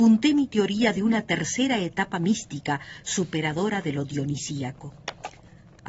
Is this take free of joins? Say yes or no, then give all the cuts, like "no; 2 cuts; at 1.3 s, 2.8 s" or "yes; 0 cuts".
yes; 0 cuts